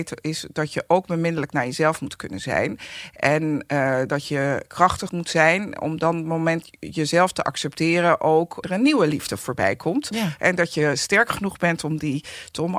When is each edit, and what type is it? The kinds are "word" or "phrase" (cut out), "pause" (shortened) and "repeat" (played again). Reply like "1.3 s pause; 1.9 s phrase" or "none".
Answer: 5.1 s word; 8.6 s word